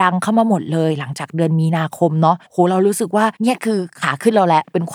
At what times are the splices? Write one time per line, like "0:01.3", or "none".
0:02.5
0:03.4